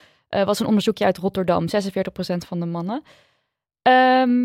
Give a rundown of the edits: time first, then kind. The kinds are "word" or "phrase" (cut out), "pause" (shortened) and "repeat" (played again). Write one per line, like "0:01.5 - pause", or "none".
none

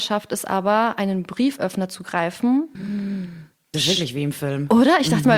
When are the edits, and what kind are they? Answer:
none

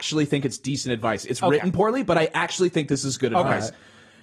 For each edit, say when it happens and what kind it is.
none

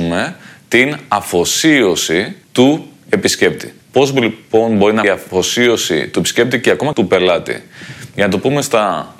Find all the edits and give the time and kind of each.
0:02.4 - pause
0:03.8 - pause
0:05.0 - word
0:06.9 - word

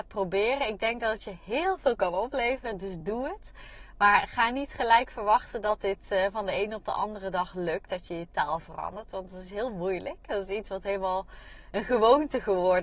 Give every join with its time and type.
none

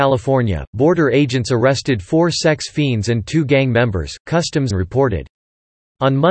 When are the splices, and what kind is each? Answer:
0:04.7 - phrase

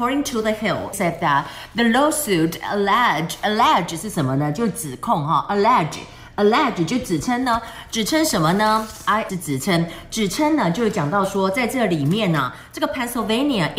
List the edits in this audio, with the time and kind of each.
0:00.9 - word
0:09.3 - word

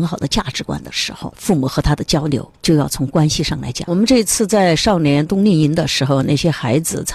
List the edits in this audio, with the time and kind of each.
0:02.5 - pause

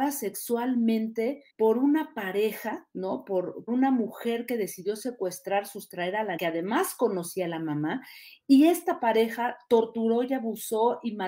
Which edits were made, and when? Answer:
0:01.5 - pause
0:03.7 - word
0:06.4 - word

